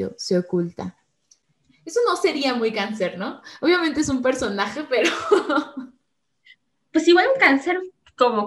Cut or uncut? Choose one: uncut